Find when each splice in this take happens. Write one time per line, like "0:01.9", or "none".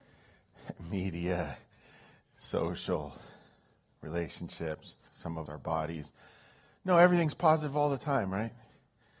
0:05.1
0:05.5